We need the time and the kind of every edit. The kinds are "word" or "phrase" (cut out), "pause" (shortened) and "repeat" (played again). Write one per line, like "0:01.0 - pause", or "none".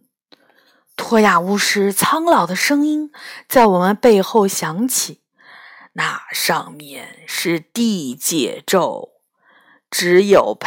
none